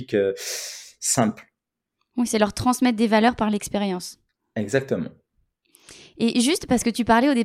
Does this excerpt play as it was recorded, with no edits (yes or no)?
yes